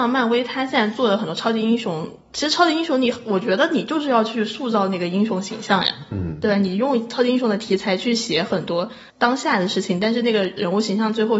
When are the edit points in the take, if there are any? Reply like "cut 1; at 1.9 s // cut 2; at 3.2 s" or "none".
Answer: cut 1; at 2.2 s // cut 2; at 9.1 s